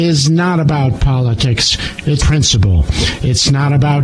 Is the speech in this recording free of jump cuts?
no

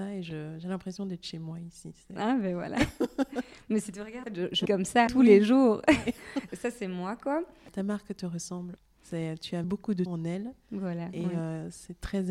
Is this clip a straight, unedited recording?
no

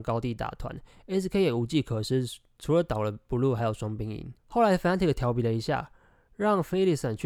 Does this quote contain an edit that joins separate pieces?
yes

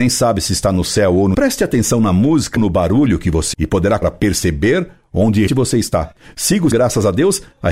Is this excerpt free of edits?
no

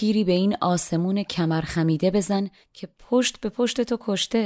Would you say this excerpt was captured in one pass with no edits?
yes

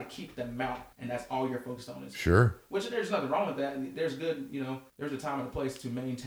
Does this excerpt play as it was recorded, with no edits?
no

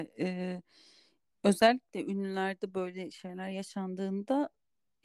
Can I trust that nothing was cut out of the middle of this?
yes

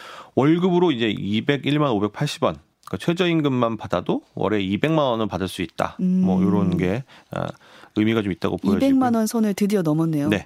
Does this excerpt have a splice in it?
no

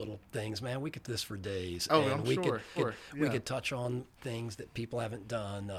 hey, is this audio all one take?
no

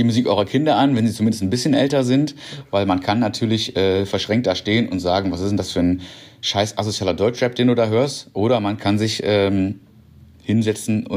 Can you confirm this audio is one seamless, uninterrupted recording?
yes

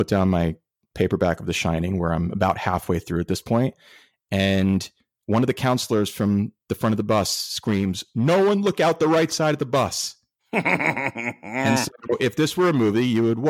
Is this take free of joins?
yes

